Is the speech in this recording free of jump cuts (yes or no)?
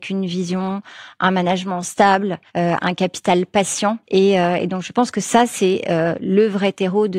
no